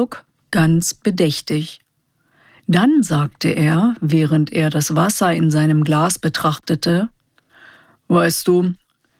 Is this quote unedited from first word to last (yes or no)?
yes